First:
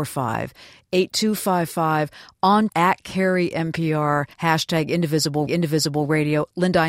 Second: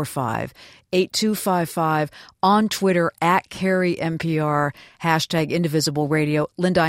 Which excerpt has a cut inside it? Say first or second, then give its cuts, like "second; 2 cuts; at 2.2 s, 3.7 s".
first; 3 cuts; at 2.7 s, 4.3 s, 5.5 s